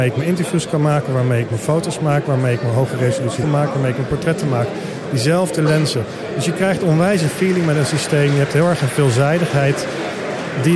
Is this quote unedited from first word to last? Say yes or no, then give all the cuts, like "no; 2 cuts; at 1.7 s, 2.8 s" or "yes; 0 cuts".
no; 1 cut; at 3.4 s